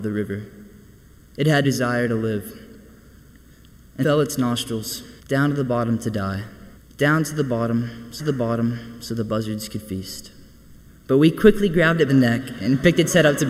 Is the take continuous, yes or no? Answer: no